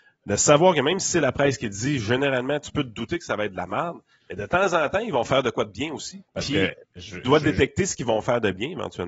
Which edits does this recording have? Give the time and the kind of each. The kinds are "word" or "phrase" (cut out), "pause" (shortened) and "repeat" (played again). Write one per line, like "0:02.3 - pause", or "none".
0:06.3 - pause